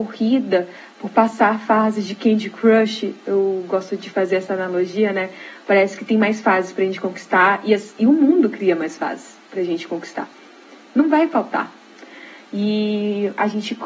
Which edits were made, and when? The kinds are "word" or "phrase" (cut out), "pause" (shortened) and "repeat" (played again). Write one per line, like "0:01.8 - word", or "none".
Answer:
none